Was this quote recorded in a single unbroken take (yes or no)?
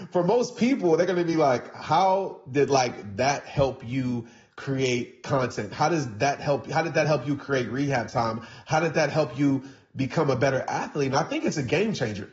yes